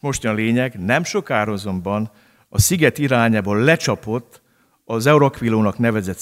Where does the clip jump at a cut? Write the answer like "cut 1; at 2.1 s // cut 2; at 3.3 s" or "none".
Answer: none